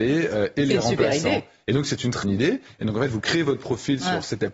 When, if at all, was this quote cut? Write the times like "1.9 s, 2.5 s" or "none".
2.2 s